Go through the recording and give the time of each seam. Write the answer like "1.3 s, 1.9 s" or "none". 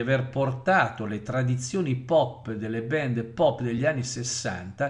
none

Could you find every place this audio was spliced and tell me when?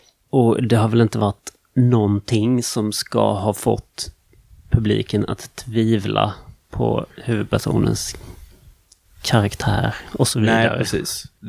none

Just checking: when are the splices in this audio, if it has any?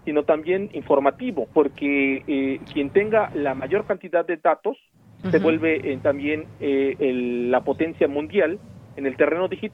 1.5 s, 5.2 s, 7.0 s

